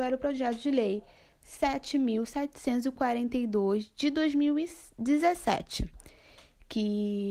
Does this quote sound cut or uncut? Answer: uncut